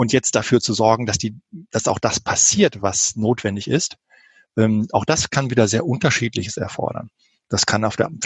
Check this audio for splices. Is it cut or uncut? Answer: uncut